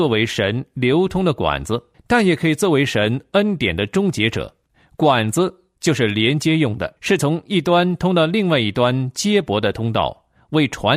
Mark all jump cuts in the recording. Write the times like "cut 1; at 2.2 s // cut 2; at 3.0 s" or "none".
cut 1; at 1.9 s // cut 2; at 4.7 s // cut 3; at 7.0 s